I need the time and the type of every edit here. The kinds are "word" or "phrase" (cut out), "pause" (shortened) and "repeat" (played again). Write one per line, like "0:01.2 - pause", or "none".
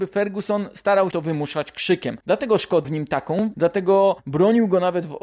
0:01.1 - word
0:02.2 - pause
0:02.8 - word
0:03.5 - word
0:04.2 - pause